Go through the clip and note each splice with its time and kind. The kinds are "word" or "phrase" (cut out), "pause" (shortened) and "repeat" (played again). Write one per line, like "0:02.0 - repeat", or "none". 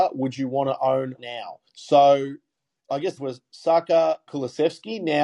0:01.2 - word
0:01.7 - pause
0:03.2 - phrase
0:04.3 - phrase